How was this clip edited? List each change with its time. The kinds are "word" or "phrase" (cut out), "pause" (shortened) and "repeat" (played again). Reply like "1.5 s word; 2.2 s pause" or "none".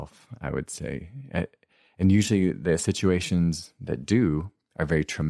none